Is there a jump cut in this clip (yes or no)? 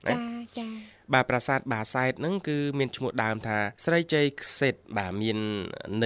yes